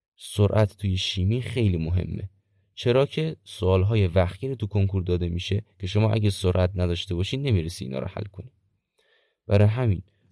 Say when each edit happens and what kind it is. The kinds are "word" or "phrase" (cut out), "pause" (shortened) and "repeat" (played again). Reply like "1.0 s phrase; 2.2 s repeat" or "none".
none